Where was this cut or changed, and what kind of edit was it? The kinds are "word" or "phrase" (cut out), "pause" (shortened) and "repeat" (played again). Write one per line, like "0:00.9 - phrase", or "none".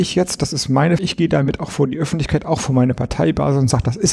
0:01.0 - word